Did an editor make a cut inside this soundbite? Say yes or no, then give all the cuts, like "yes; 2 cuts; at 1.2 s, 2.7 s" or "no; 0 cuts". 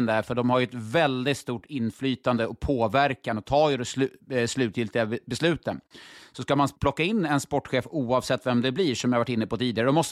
yes; 1 cut; at 6.8 s